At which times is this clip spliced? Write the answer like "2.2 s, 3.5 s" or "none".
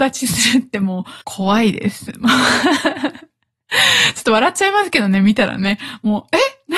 1.2 s

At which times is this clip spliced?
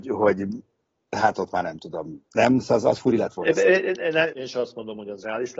4.3 s

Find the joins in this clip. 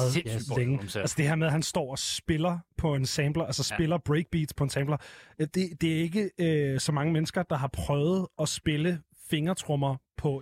none

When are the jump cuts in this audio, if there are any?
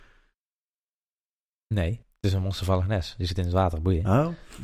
2.0 s

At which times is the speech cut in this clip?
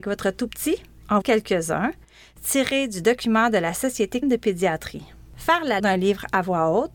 1.2 s, 4.2 s, 5.8 s

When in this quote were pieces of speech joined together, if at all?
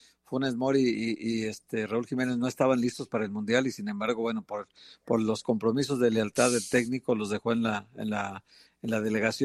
none

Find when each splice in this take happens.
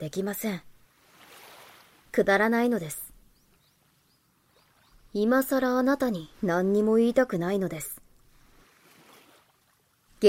6.3 s

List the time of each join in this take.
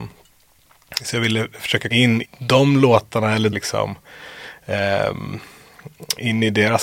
1.9 s, 2.2 s, 3.5 s

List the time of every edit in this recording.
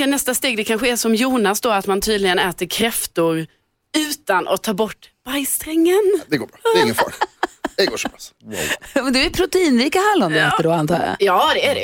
none

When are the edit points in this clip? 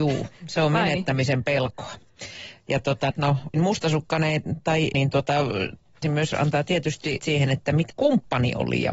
3.1 s, 3.5 s, 4.9 s, 6.0 s, 7.2 s, 7.9 s

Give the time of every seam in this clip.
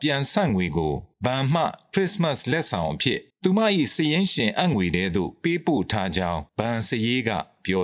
1.1 s, 3.3 s, 6.5 s

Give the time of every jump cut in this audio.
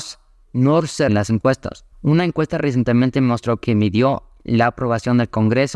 1.1 s, 1.9 s

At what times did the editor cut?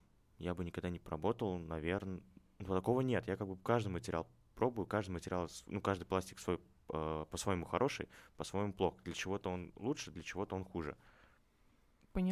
none

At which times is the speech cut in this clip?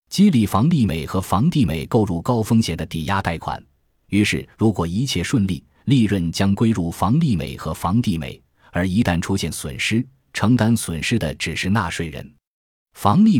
none

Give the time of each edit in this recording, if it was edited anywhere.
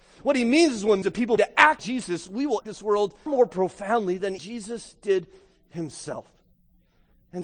1.0 s, 1.4 s, 1.8 s, 2.6 s, 3.3 s, 4.4 s

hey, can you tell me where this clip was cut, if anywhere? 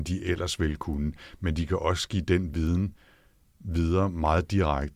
none

